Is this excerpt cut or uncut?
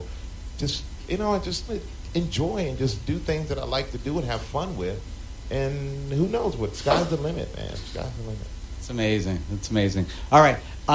cut